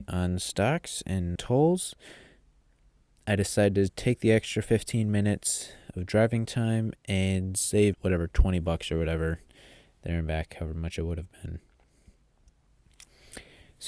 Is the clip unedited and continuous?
no; 2 cuts; at 1.4 s, 7.9 s

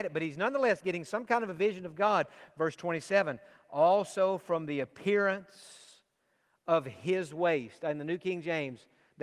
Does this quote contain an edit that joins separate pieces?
no; 0 cuts

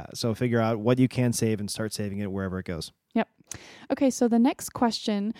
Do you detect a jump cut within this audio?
no; 0 cuts

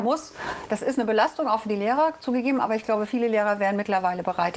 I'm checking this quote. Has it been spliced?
no; 0 cuts

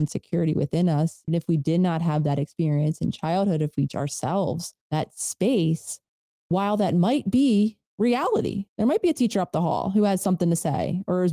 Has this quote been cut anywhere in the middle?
yes; 5 cuts; at 1.3 s, 3.9 s, 4.8 s, 6.5 s, 8.7 s

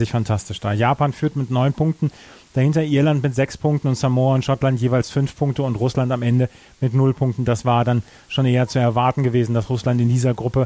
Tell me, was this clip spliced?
no; 0 cuts

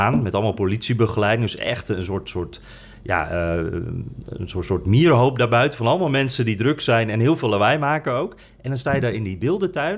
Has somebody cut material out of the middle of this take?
no; 0 cuts

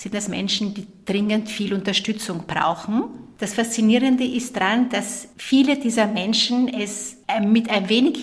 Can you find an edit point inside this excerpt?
no; 0 cuts

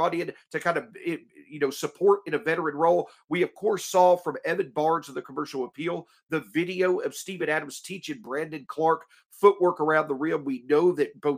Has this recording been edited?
no; 0 cuts

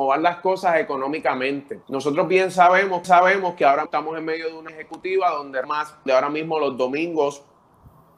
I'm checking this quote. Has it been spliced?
yes; 6 cuts; at 1.8 s, 3.0 s, 3.9 s, 4.7 s, 5.6 s, 6.1 s

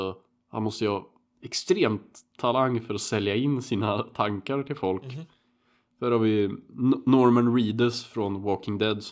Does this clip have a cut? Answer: no; 0 cuts

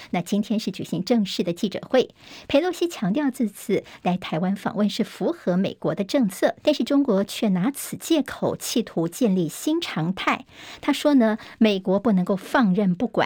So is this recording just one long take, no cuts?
no; 1 cut; at 6.6 s

